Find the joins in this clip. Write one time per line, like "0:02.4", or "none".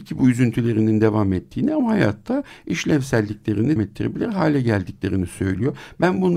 0:03.8